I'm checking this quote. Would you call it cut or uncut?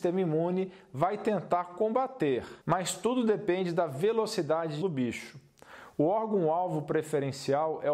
cut